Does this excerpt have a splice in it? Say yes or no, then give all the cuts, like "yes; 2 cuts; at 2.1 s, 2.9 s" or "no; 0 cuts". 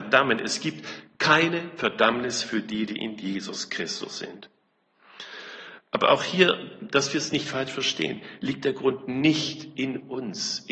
no; 0 cuts